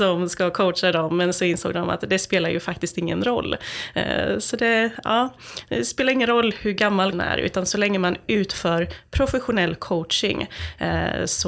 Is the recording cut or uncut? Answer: cut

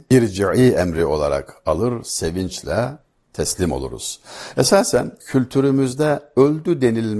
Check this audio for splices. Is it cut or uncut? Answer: uncut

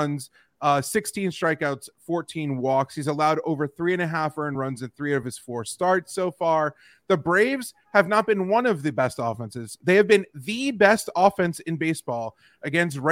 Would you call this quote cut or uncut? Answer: uncut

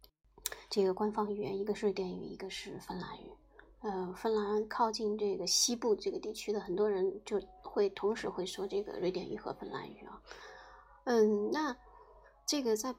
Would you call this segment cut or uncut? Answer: uncut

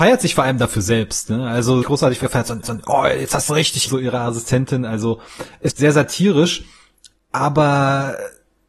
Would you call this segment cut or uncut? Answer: cut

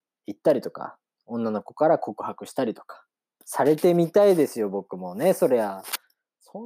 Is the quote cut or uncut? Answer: uncut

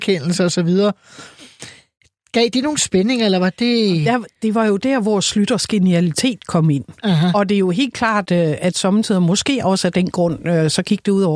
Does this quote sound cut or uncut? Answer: cut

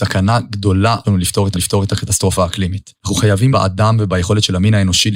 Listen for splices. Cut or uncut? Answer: cut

